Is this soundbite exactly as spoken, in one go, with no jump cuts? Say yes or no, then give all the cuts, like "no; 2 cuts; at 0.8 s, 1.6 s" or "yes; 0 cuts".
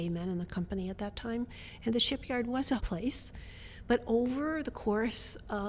no; 1 cut; at 2.8 s